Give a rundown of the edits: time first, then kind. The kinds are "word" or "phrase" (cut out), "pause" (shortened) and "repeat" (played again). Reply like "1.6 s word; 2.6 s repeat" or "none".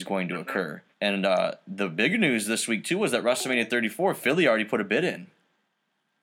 0.9 s pause